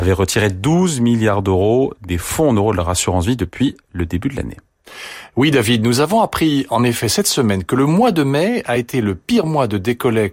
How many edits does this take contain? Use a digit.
0